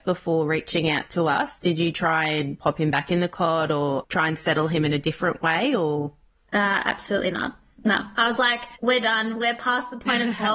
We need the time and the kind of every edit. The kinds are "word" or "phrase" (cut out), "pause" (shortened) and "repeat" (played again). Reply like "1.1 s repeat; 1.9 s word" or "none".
none